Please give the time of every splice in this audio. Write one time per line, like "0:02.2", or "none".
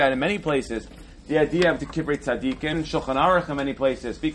0:01.8
0:02.7